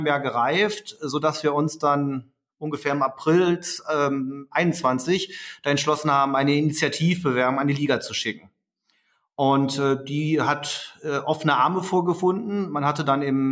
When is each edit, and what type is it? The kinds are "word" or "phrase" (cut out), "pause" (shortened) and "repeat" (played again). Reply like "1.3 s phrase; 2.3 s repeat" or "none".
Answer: none